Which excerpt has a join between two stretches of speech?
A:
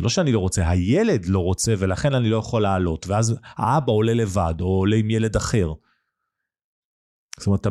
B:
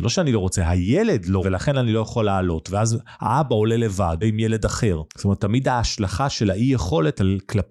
B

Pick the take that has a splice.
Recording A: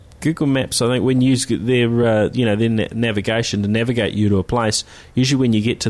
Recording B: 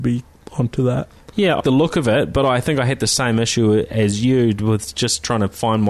B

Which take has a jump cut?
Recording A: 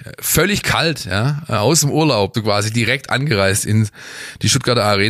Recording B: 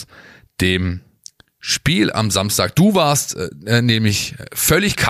A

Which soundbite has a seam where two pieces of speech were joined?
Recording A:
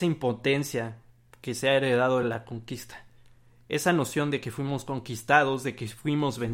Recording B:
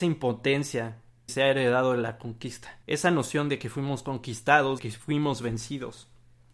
B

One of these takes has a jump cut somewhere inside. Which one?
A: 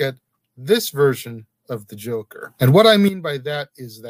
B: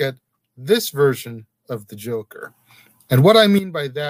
A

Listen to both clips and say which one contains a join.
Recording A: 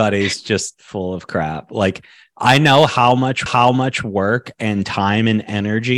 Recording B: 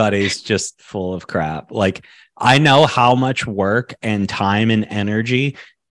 A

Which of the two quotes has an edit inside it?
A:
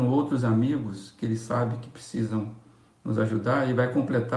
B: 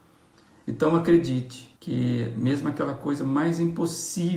B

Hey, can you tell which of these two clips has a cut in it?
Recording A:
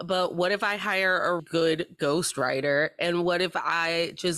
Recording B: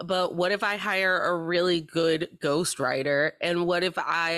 A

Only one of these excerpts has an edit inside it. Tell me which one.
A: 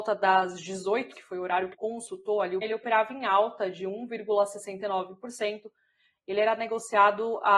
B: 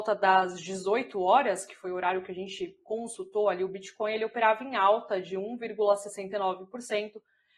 A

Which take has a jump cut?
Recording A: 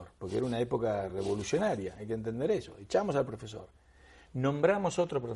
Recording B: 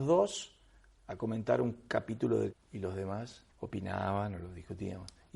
B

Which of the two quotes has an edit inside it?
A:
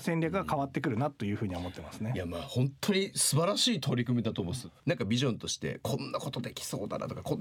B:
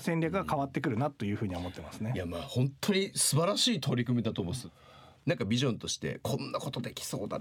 A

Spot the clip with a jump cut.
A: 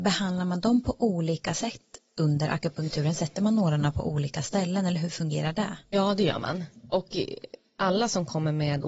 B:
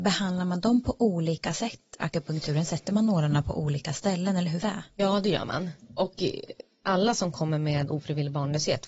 B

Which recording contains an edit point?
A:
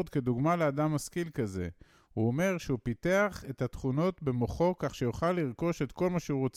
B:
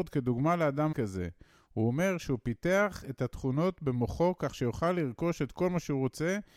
B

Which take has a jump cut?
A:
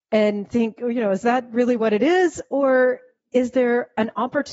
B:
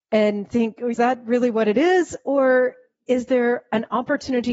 B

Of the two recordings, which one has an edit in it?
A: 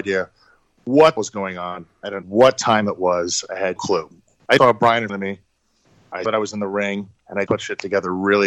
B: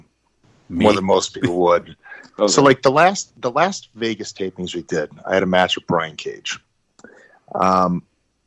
A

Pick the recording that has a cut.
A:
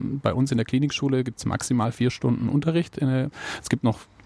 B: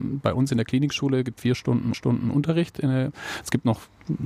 B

